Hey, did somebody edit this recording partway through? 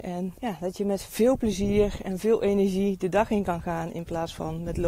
no; 0 cuts

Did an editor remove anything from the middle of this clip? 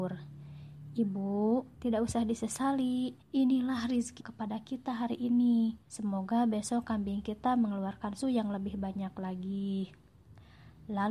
yes; 5 cuts; at 1.7 s, 3.2 s, 4.2 s, 5.8 s, 8.2 s

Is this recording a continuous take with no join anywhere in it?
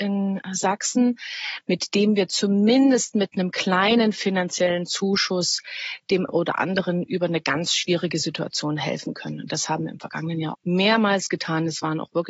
no; 2 cuts; at 6.3 s, 10.5 s

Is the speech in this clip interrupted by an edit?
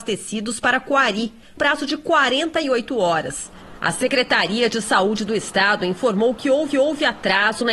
yes; 2 cuts; at 1.6 s, 6.7 s

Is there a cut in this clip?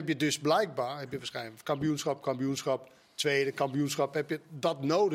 no; 0 cuts

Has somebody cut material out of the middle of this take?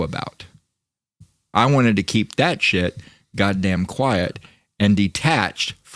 no; 0 cuts

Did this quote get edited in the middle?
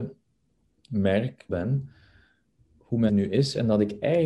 yes; 3 cuts; at 1.5 s, 2.6 s, 3.1 s

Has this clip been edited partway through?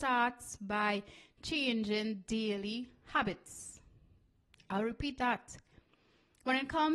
no; 0 cuts

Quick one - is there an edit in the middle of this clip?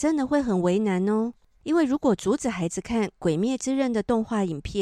no; 0 cuts

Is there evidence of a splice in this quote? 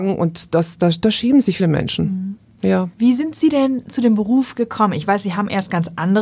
yes; 2 cuts; at 1.6 s, 2.9 s

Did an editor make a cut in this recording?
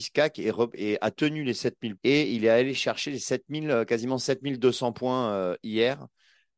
yes; 1 cut; at 2.0 s

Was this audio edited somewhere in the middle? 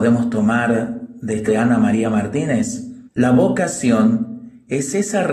yes; 2 cuts; at 1.5 s, 3.1 s

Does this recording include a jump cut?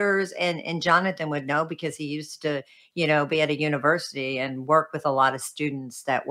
no; 0 cuts

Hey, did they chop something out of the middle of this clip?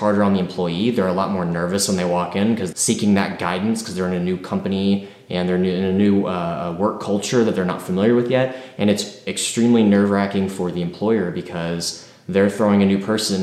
yes; 1 cut; at 2.7 s

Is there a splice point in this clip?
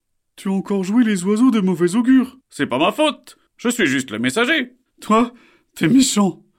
yes; 3 cuts; at 2.4 s, 3.5 s, 4.9 s

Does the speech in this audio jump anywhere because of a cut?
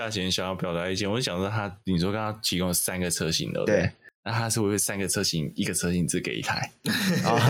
no; 0 cuts

